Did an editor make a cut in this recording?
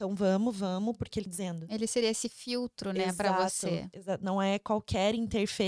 yes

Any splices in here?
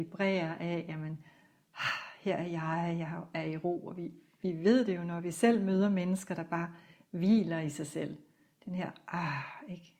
no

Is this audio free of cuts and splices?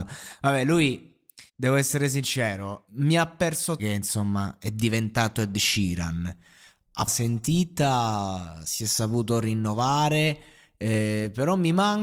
no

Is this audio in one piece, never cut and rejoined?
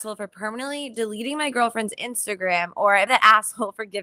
no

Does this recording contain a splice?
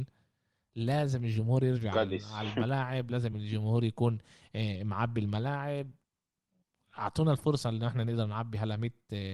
no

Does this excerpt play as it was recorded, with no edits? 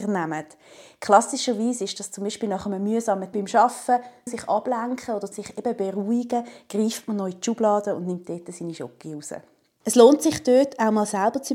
no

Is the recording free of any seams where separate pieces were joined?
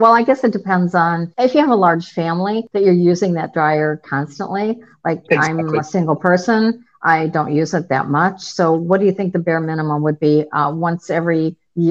yes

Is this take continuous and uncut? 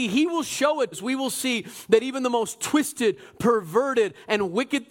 no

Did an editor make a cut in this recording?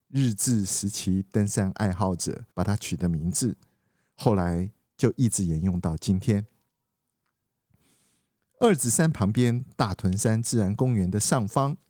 yes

